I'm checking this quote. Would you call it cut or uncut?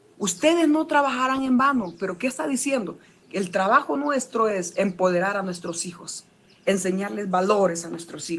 uncut